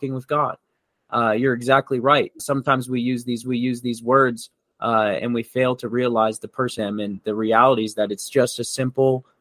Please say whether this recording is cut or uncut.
cut